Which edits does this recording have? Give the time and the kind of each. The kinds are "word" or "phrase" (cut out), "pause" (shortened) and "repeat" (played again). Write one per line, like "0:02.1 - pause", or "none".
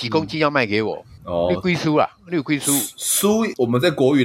0:01.2 - pause